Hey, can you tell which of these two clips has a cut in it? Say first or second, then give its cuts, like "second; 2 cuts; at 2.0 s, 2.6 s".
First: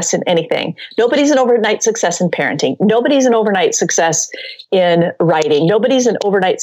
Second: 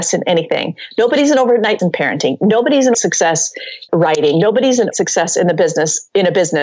second; 4 cuts; at 1.8 s, 2.9 s, 3.9 s, 4.9 s